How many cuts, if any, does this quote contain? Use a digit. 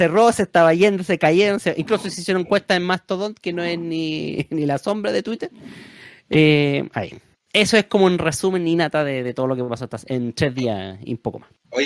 0